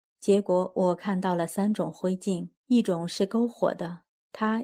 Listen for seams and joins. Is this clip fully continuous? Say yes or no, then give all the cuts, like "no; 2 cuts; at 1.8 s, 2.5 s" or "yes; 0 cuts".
no; 1 cut; at 2.6 s